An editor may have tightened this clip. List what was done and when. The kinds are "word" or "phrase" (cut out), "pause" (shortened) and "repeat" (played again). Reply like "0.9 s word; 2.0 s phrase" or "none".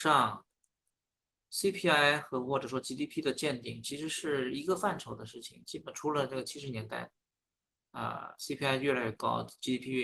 none